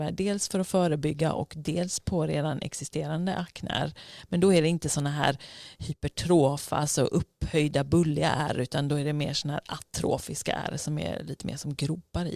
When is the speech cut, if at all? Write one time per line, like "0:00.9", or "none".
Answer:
none